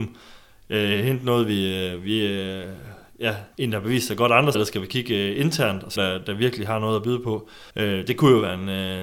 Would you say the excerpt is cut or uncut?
cut